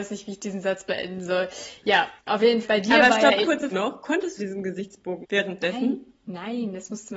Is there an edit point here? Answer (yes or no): yes